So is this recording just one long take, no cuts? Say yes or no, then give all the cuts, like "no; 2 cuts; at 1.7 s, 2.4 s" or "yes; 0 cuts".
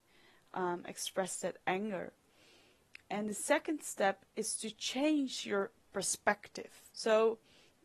no; 3 cuts; at 3.0 s, 4.3 s, 6.9 s